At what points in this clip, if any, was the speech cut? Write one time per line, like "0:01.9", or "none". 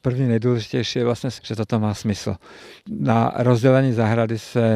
0:01.4